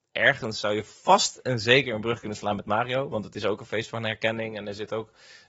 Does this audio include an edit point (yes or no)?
no